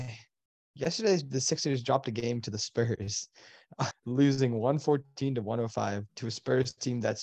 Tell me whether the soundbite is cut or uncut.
cut